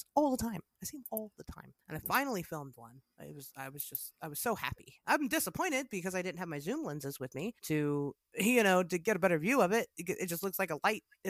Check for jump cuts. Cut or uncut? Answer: cut